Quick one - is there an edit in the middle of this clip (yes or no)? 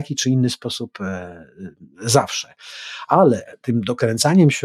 yes